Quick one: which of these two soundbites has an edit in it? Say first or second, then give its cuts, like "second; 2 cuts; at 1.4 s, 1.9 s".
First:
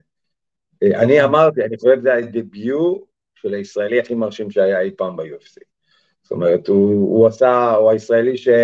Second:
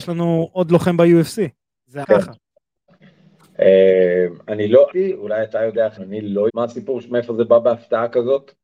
second; 4 cuts; at 2.0 s, 4.9 s, 6.0 s, 6.5 s